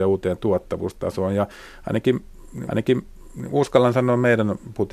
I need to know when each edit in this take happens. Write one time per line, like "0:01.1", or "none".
0:02.7